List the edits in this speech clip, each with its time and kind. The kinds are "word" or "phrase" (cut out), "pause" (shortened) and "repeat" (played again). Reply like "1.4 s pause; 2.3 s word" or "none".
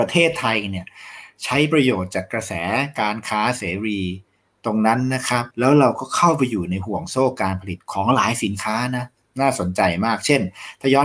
5.5 s pause